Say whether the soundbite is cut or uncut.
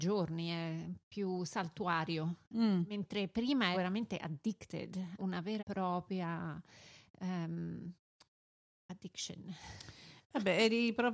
cut